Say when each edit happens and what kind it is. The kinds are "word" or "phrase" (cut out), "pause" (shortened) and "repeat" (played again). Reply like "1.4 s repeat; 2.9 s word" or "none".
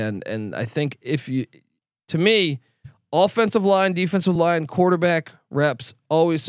none